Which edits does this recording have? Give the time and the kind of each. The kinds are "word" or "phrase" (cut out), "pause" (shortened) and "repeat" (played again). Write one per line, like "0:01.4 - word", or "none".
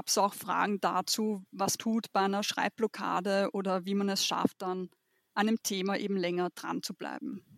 0:01.8 - word